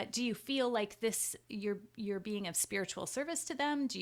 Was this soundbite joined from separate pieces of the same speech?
no; 0 cuts

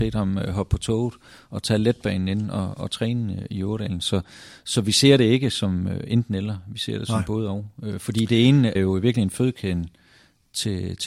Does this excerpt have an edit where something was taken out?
yes; 1 cut; at 8.8 s

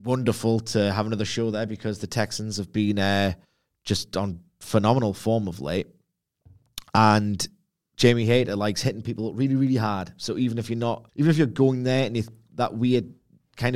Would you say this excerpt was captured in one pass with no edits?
no; 2 cuts; at 3.4 s, 11.1 s

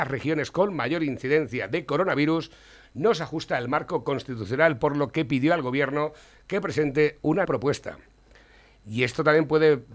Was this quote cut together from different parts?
yes; 1 cut; at 7.4 s

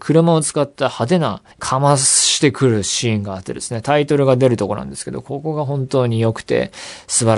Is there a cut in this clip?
yes; 1 cut; at 1.5 s

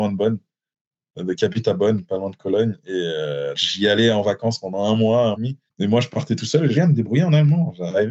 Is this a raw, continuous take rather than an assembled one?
no; 3 cuts; at 3.5 s, 5.3 s, 6.7 s

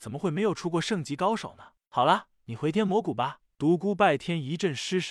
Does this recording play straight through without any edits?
yes; 0 cuts

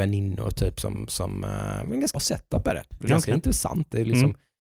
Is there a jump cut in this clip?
yes; 2 cuts; at 2.1 s, 3.1 s

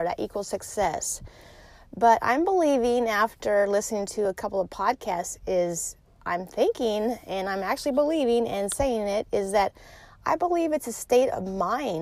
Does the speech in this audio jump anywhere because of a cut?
no; 0 cuts

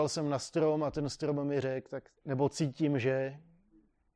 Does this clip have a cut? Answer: yes; 1 cut; at 2.2 s

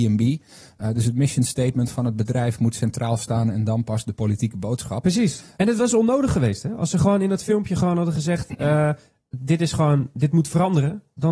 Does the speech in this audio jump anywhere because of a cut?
no; 0 cuts

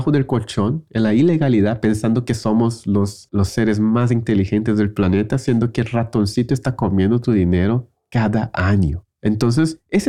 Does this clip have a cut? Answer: no; 0 cuts

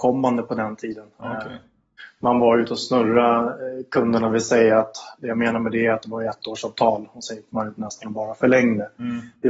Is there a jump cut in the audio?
no; 0 cuts

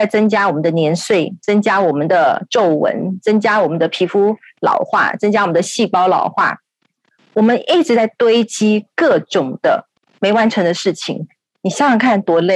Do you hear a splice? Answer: no; 0 cuts

